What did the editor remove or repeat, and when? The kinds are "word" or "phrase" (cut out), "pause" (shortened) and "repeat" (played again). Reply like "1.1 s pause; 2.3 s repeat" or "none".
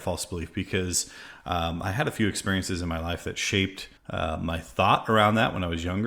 4.0 s pause